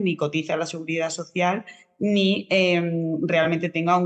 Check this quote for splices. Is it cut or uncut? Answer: uncut